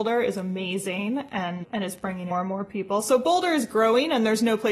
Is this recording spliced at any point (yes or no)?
yes